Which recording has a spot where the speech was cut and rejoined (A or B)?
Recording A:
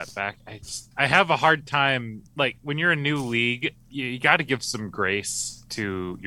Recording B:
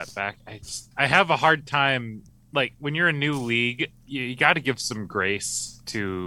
A